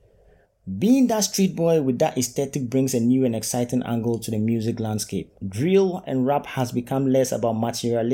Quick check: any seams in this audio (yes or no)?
yes